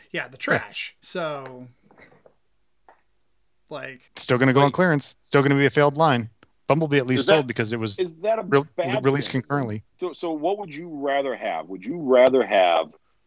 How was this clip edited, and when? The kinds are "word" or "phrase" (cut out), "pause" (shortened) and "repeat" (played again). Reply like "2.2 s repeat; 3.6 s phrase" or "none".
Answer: 1.0 s pause; 4.1 s pause; 9.9 s pause